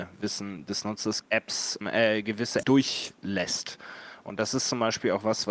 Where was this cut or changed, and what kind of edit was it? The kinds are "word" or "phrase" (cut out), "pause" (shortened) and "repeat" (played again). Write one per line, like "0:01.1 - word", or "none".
0:01.2 - word
0:01.8 - word
0:02.6 - word